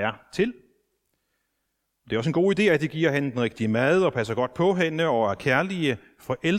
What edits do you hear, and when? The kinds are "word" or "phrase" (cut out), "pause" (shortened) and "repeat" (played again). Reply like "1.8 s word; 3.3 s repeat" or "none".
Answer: none